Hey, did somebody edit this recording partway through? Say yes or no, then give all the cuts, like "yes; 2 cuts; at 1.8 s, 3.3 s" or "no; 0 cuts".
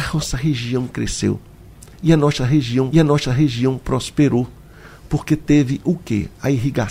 yes; 2 cuts; at 1.9 s, 2.9 s